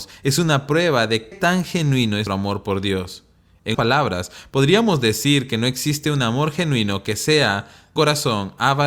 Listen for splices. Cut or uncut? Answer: cut